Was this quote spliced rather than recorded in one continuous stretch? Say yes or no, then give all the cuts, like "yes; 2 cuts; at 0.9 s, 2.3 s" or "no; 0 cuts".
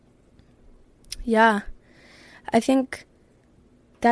no; 0 cuts